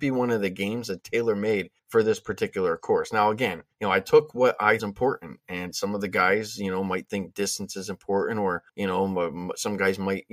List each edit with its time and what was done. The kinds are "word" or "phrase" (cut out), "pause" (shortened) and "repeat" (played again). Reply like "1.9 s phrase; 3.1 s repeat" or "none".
1.0 s word; 1.8 s pause; 3.7 s pause; 4.8 s phrase; 8.7 s pause

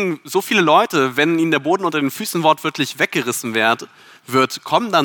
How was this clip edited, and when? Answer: none

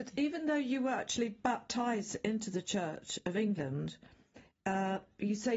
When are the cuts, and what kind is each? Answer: none

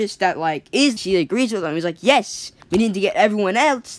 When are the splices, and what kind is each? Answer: 1.0 s phrase; 2.6 s pause

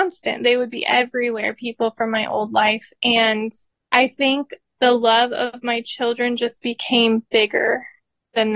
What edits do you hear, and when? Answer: none

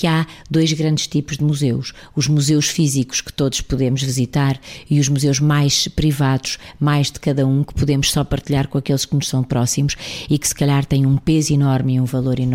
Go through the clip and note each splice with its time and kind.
none

